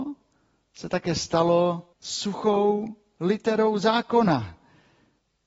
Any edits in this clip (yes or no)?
yes